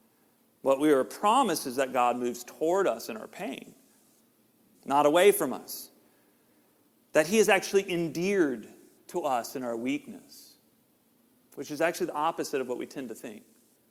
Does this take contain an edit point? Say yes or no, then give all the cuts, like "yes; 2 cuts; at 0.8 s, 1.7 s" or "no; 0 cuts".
no; 0 cuts